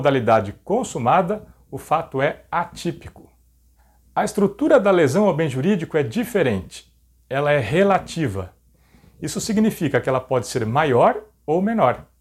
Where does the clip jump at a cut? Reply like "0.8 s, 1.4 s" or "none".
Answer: none